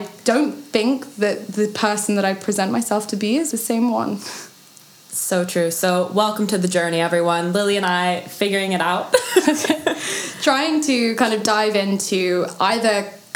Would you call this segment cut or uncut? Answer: cut